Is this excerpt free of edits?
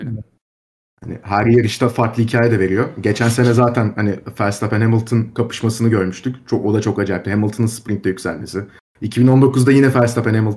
yes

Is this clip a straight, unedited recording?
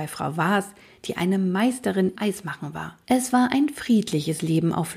no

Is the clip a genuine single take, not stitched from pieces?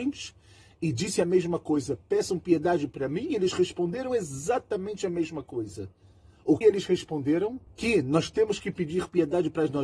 no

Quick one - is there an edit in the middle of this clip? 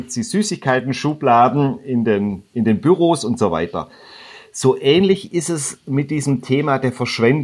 yes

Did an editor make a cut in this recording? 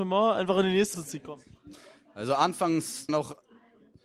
yes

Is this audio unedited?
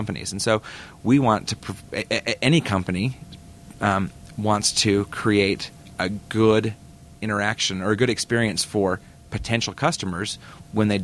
yes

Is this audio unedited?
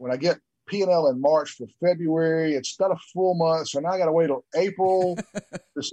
yes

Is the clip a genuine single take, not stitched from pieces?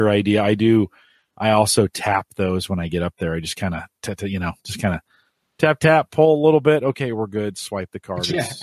yes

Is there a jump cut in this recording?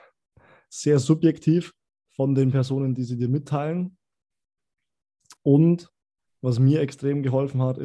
yes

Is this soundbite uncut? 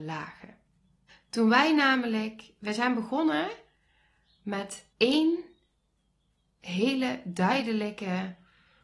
no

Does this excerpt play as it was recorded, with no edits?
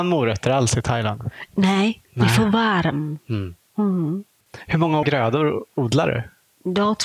no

